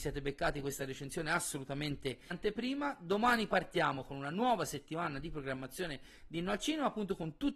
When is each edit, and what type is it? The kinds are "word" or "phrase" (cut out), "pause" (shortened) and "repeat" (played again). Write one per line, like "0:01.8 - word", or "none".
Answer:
0:02.3 - word